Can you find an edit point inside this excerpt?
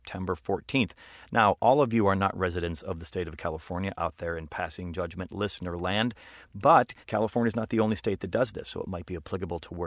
yes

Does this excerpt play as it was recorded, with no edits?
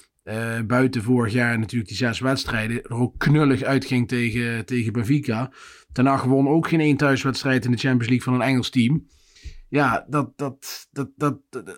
yes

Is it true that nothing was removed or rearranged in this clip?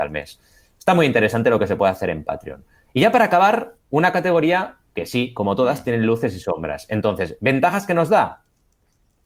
yes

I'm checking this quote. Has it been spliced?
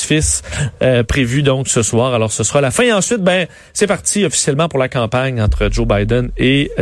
no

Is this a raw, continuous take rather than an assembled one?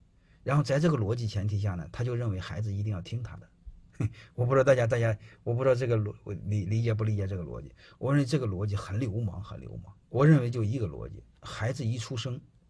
no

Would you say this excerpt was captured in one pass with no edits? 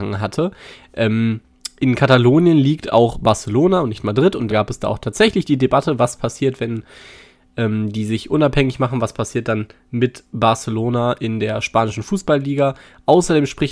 no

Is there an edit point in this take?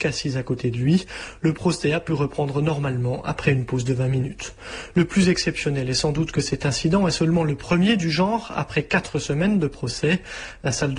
no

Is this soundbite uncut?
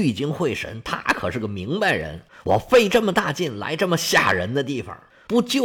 yes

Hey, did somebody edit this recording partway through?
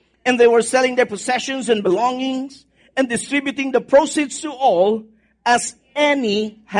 no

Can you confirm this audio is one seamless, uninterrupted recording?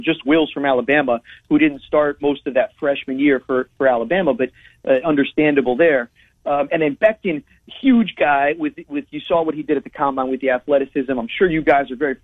yes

